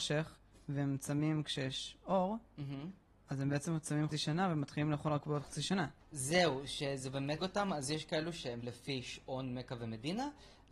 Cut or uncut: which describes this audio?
cut